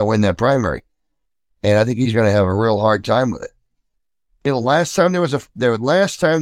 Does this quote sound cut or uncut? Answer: uncut